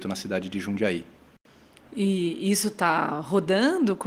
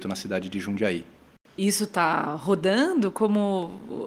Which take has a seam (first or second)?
second